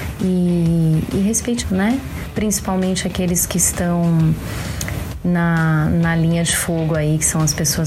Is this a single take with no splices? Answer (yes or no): no